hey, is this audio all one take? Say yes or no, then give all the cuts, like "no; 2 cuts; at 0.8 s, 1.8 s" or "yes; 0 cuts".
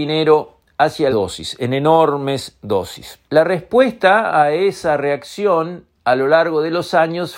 no; 2 cuts; at 1.1 s, 3.2 s